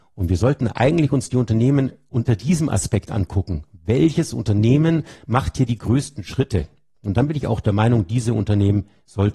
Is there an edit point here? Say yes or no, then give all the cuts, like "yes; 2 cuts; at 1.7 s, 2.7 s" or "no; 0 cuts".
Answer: no; 0 cuts